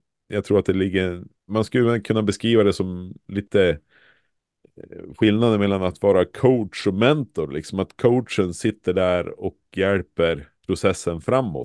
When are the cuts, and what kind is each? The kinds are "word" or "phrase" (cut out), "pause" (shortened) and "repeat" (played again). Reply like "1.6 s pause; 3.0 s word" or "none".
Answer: 1.4 s pause; 10.6 s pause